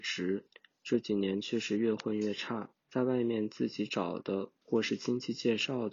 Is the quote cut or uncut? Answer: cut